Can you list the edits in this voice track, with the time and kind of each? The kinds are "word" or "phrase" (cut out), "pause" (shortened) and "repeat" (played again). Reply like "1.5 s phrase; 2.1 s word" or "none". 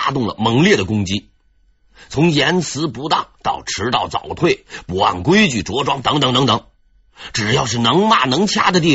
none